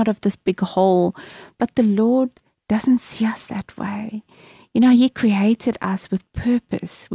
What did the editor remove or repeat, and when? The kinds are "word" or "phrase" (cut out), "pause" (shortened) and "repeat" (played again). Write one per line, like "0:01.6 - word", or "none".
none